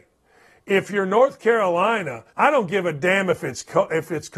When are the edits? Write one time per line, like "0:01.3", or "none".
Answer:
0:02.3